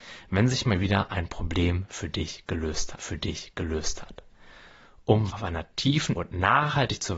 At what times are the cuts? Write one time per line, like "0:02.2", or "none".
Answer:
0:03.0
0:05.3
0:06.2